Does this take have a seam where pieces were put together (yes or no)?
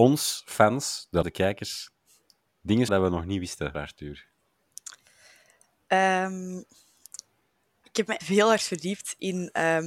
yes